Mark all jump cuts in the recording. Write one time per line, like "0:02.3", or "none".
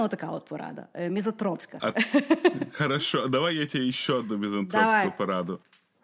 none